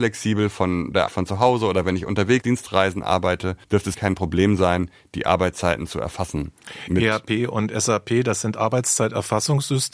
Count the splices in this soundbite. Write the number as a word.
four